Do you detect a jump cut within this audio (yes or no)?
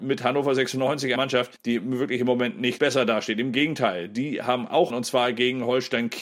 yes